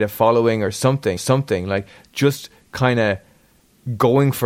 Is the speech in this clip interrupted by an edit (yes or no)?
yes